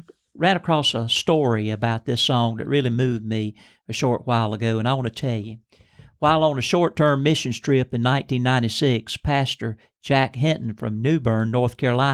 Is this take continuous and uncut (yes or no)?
yes